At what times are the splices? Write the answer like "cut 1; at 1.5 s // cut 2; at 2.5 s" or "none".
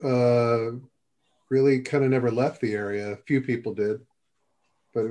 cut 1; at 3.2 s